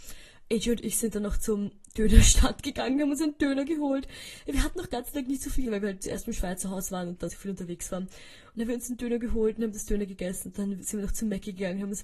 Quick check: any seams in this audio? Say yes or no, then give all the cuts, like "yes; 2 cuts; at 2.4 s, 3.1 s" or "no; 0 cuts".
yes; 2 cuts; at 5.6 s, 7.3 s